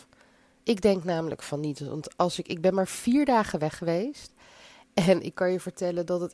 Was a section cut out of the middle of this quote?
no; 0 cuts

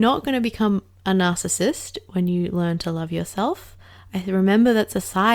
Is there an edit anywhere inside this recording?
no; 0 cuts

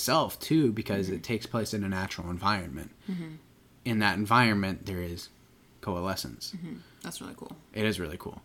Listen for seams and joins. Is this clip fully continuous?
yes; 0 cuts

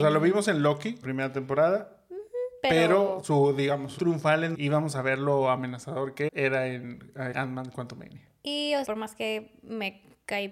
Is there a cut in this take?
yes; 6 cuts; at 1.0 s, 4.0 s, 4.5 s, 6.3 s, 7.3 s, 8.8 s

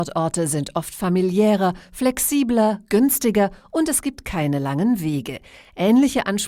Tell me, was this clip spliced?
no; 0 cuts

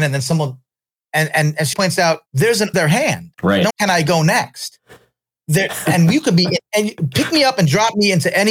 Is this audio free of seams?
no; 5 cuts; at 1.7 s, 2.3 s, 2.7 s, 3.3 s, 3.7 s

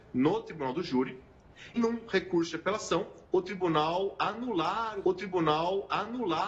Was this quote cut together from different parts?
yes; 3 cuts; at 1.8 s, 3.3 s, 5.0 s

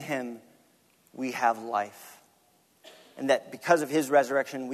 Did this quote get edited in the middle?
no; 0 cuts

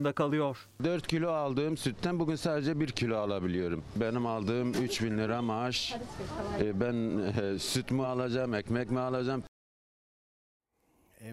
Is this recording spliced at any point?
no; 0 cuts

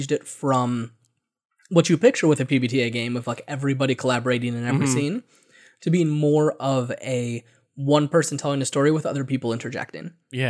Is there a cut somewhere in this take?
no; 0 cuts

